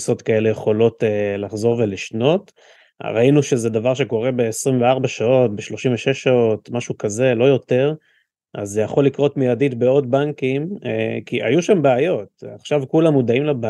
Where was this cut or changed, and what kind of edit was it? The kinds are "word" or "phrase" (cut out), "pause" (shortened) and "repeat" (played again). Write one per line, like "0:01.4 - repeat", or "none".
none